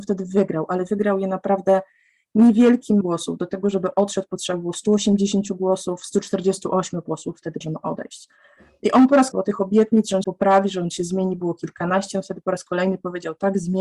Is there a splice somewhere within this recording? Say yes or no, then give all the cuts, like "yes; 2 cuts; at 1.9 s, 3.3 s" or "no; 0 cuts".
yes; 4 cuts; at 3.0 s, 7.6 s, 9.3 s, 10.2 s